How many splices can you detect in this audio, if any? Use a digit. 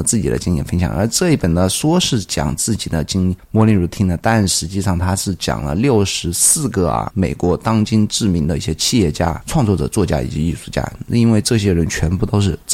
0